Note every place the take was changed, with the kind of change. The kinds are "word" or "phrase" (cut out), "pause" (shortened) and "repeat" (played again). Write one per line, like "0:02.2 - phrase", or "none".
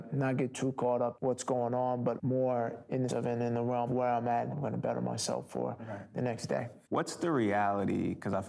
0:01.1 - word
0:02.2 - word
0:03.1 - word
0:03.9 - word
0:04.5 - word
0:06.8 - pause